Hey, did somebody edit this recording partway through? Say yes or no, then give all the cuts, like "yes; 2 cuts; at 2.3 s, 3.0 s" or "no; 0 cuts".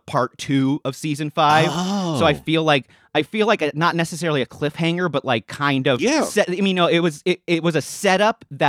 no; 0 cuts